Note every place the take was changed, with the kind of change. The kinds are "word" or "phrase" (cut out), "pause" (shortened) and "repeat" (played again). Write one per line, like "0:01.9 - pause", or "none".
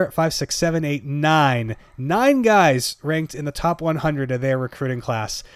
none